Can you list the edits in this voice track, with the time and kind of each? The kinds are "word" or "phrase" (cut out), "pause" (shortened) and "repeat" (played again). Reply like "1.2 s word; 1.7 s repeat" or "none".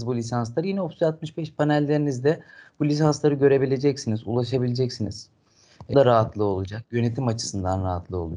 5.9 s word